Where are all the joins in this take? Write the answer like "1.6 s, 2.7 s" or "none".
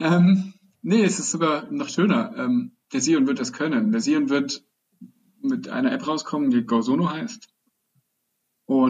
none